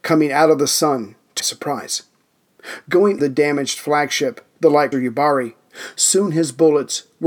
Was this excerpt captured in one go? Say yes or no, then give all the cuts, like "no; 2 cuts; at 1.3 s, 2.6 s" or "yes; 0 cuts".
no; 3 cuts; at 1.4 s, 3.2 s, 4.9 s